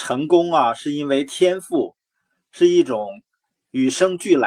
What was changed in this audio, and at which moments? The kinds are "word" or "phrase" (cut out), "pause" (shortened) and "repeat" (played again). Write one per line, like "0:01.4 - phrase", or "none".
none